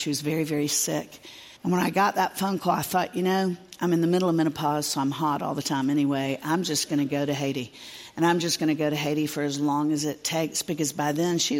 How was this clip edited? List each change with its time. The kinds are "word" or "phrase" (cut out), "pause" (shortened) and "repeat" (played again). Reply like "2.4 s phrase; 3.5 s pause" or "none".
1.6 s pause